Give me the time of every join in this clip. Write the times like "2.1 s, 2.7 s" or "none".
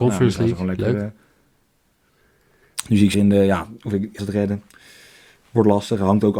3.1 s, 4.2 s